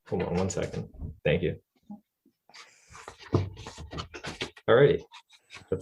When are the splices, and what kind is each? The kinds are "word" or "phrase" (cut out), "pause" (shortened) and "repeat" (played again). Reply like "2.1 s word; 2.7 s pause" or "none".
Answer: 1.2 s pause